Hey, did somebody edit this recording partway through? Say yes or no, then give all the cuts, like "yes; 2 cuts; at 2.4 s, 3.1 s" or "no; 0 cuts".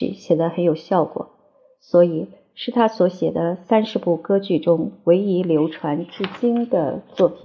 no; 0 cuts